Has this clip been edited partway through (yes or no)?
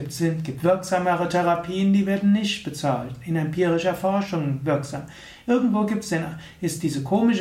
no